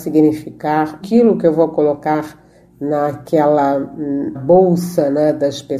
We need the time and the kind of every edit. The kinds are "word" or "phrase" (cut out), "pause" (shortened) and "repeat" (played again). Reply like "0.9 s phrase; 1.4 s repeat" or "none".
1.0 s word; 4.3 s word

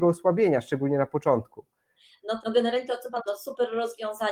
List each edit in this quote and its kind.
2.4 s word; 3.3 s word

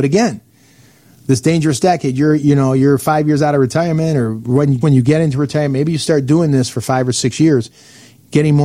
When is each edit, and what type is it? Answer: 4.8 s word

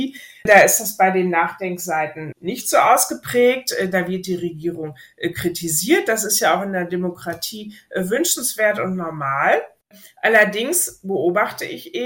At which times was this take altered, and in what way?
none

